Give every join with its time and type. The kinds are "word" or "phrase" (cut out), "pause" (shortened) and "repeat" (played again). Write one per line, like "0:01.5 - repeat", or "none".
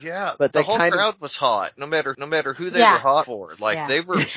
0:02.1 - repeat
0:03.2 - word